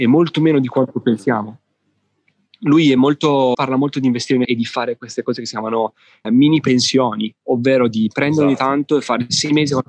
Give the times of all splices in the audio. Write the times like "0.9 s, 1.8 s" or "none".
3.5 s, 4.4 s, 6.2 s